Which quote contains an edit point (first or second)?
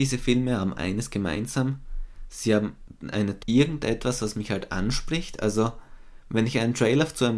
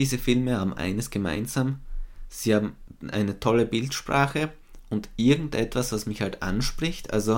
first